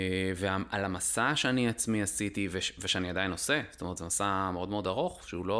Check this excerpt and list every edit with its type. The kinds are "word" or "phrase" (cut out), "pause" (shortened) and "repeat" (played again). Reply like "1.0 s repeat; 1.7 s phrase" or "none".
none